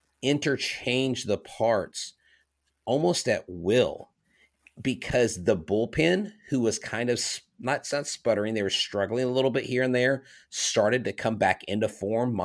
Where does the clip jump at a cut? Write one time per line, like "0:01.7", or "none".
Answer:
none

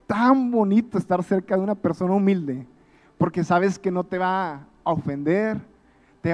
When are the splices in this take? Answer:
none

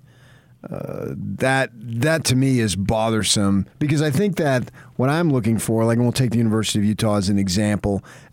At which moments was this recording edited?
0:03.7

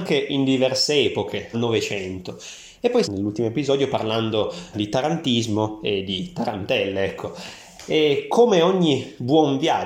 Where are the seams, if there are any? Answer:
0:01.5
0:03.0
0:04.7

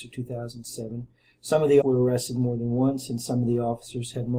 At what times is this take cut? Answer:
0:01.8

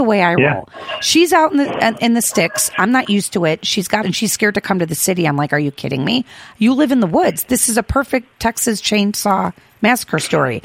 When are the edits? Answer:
0:04.0
0:08.3

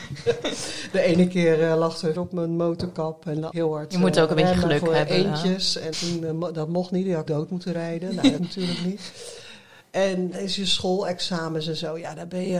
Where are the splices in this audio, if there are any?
0:02.1
0:03.5
0:05.9
0:07.3
0:08.4
0:10.3

